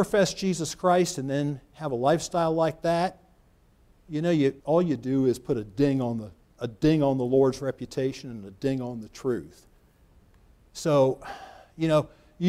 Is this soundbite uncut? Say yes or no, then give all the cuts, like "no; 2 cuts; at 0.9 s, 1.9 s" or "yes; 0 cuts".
no; 1 cut; at 4.6 s